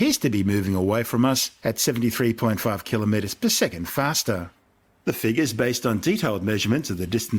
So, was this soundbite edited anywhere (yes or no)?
no